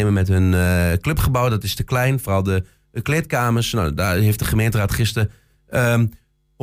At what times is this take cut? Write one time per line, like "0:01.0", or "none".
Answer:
none